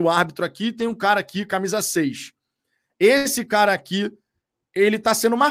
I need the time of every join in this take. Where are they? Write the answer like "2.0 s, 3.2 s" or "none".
none